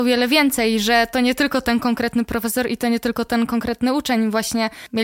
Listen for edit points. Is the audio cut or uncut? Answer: uncut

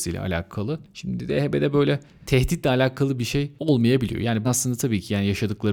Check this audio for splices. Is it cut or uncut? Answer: cut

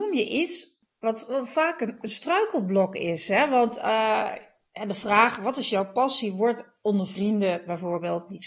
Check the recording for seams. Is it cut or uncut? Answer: uncut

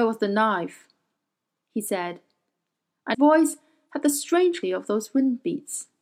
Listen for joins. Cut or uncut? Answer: cut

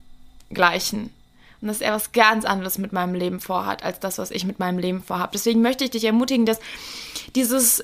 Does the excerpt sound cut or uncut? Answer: uncut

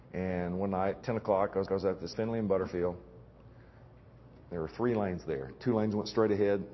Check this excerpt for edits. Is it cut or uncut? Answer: cut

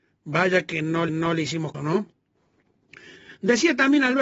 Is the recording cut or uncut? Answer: cut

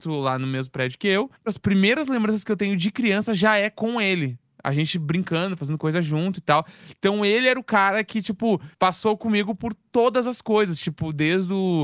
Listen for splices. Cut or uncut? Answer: cut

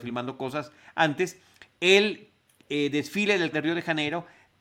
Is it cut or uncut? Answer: cut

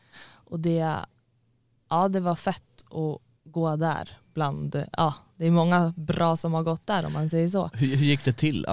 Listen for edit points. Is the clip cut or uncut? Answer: uncut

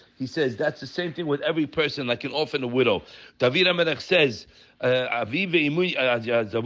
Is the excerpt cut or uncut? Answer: uncut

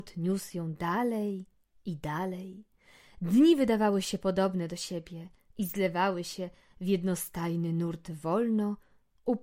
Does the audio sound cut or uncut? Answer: uncut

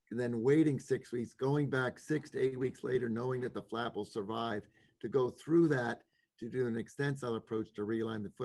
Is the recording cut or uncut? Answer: uncut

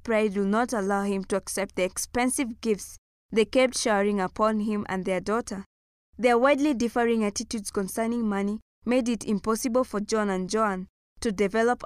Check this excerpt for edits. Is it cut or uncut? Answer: uncut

